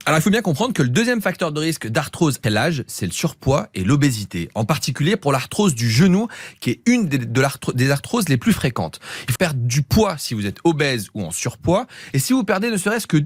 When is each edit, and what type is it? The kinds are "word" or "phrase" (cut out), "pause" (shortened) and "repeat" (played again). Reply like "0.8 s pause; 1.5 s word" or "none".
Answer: 2.4 s word; 9.4 s word